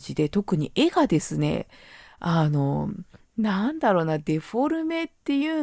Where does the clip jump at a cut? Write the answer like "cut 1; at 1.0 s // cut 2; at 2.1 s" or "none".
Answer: none